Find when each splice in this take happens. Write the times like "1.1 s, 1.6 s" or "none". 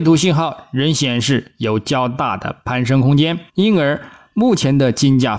3.5 s